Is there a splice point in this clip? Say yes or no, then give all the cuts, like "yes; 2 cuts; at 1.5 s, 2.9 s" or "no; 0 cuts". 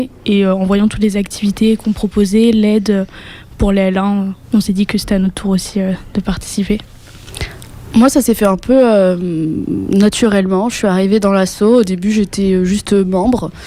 yes; 1 cut; at 4.4 s